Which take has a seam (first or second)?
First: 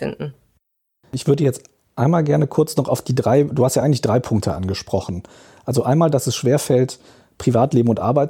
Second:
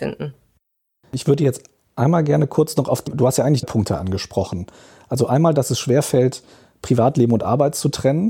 second